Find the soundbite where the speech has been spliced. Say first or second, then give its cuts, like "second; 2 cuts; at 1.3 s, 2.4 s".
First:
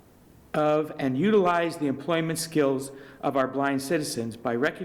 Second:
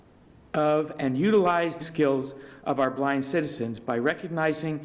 second; 1 cut; at 1.8 s